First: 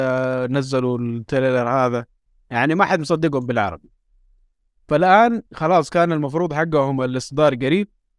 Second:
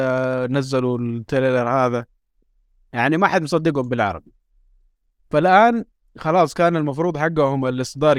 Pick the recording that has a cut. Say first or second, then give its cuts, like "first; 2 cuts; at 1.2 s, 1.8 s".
first; 2 cuts; at 2.3 s, 5.5 s